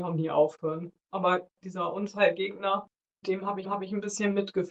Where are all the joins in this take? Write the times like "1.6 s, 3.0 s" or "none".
1.5 s, 3.2 s, 3.6 s